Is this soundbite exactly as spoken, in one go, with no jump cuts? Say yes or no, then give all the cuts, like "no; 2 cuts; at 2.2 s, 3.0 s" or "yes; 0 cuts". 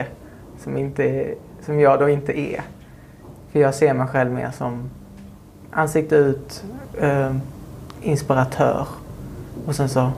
yes; 0 cuts